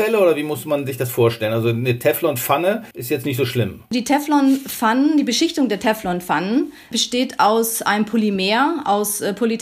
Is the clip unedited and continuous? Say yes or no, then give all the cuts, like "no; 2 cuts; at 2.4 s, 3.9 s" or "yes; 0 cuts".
no; 1 cut; at 2.9 s